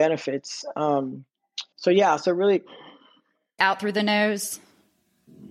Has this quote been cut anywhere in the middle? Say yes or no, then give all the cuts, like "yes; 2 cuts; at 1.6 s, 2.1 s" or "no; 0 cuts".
yes; 2 cuts; at 1.7 s, 3.6 s